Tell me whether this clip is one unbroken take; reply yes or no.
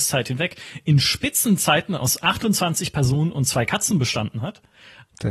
yes